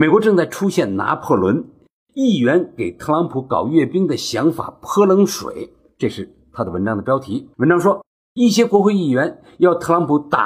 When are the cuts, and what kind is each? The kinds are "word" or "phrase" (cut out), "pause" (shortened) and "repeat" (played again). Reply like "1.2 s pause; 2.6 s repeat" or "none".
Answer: 7.5 s pause